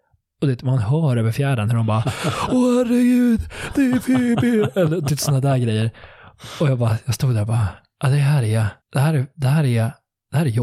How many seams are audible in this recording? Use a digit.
1